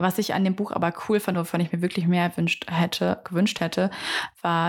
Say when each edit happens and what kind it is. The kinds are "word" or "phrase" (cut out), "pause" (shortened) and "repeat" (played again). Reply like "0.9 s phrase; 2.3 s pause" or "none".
none